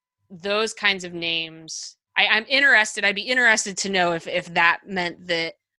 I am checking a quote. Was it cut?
yes; 1 cut; at 2.1 s

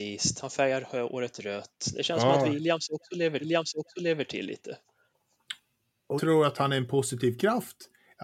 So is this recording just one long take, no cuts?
no; 2 cuts; at 3.4 s, 6.2 s

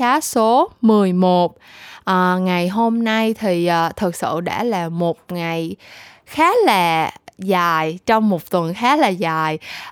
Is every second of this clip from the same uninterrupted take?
yes; 0 cuts

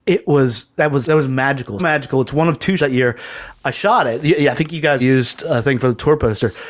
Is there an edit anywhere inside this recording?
yes; 4 cuts; at 1.0 s, 1.8 s, 2.8 s, 5.0 s

